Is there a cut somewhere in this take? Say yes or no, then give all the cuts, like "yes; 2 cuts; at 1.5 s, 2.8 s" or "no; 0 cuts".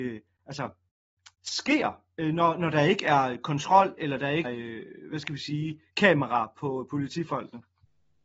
yes; 2 cuts; at 1.3 s, 4.4 s